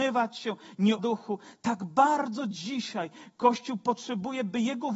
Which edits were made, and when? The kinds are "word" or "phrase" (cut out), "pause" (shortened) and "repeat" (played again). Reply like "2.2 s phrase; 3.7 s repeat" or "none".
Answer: 1.0 s phrase